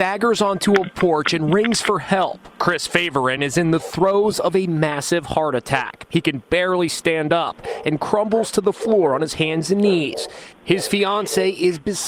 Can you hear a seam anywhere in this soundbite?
no; 0 cuts

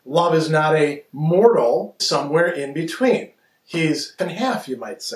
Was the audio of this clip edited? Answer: yes; 2 cuts; at 2.0 s, 4.2 s

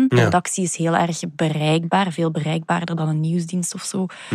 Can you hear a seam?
no; 0 cuts

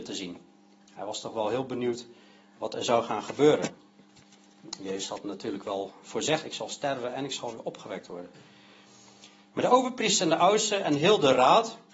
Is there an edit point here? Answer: yes; 1 cut; at 6.4 s

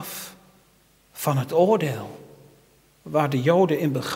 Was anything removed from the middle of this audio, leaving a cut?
no; 0 cuts

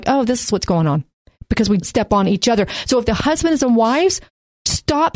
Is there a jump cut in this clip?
yes; 1 cut; at 1.8 s

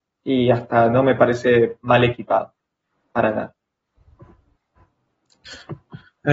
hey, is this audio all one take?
yes; 0 cuts

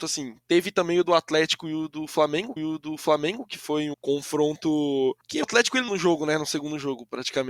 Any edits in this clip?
yes; 4 cuts; at 2.6 s, 3.9 s, 5.4 s, 5.9 s

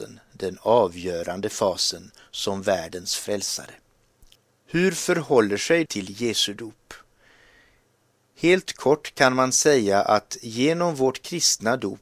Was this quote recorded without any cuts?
no; 2 cuts; at 4.3 s, 5.9 s

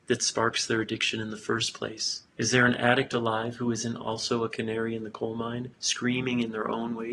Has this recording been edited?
yes; 2 cuts; at 2.3 s, 5.7 s

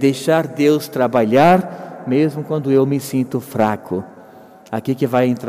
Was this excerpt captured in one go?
yes; 0 cuts

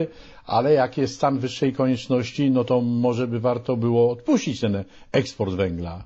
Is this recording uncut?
yes; 0 cuts

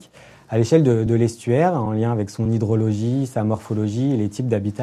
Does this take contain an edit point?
no; 0 cuts

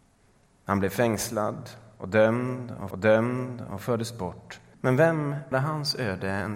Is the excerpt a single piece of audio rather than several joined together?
no; 3 cuts; at 2.9 s, 4.7 s, 5.5 s

